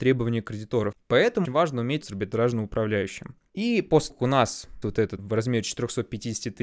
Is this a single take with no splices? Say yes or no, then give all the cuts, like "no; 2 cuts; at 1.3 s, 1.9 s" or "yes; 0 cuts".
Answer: no; 5 cuts; at 1.4 s, 2.0 s, 4.1 s, 4.8 s, 5.2 s